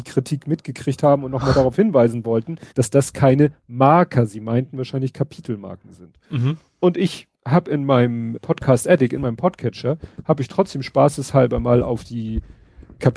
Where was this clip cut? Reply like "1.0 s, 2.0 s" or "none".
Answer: 2.7 s, 7.3 s, 8.4 s